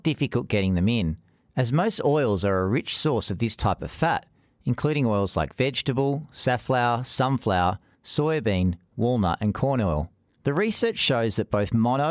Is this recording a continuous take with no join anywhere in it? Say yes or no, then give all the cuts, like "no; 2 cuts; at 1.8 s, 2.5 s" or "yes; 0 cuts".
yes; 0 cuts